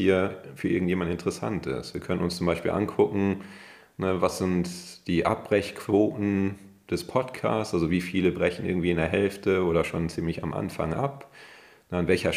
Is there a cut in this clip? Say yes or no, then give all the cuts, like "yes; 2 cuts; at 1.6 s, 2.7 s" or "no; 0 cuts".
no; 0 cuts